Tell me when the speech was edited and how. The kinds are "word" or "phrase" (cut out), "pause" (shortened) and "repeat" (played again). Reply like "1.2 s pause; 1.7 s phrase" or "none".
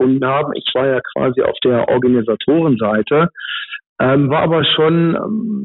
none